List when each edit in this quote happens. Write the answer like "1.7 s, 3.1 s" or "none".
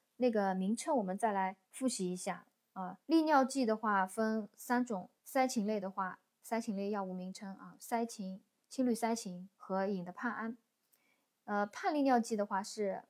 1.6 s, 3.0 s, 5.2 s, 9.5 s